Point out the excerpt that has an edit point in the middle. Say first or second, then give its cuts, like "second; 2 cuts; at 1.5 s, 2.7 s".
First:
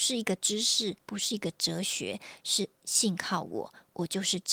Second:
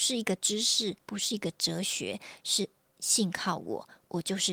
first; 1 cut; at 2.7 s